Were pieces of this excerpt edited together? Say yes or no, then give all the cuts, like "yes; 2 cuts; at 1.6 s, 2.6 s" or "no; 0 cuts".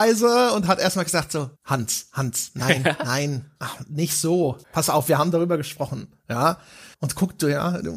yes; 3 cuts; at 1.6 s, 4.6 s, 6.9 s